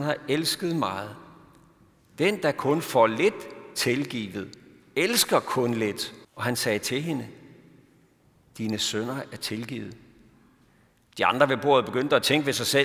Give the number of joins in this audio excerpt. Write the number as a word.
one